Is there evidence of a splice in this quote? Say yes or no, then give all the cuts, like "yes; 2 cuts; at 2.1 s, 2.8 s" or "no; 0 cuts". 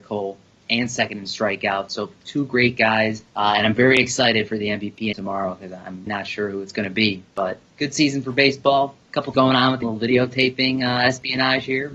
yes; 8 cuts; at 2.2 s, 3.2 s, 5.1 s, 6.1 s, 7.7 s, 9.0 s, 9.3 s, 9.8 s